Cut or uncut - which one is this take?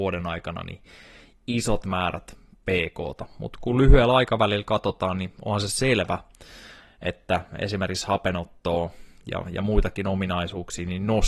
uncut